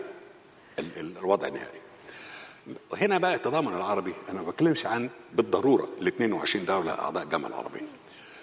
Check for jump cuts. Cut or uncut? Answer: cut